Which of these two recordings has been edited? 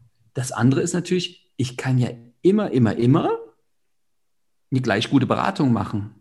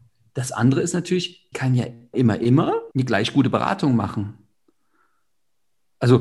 second; 3 cuts; at 1.5 s, 2.1 s, 2.9 s

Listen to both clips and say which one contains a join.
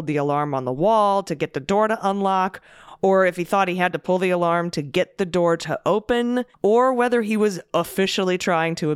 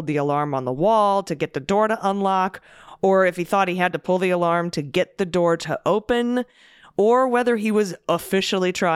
first; 1 cut; at 6.5 s

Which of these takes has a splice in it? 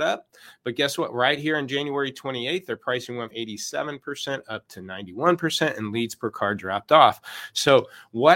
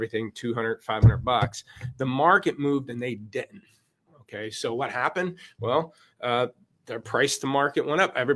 first; 1 cut; at 3.3 s

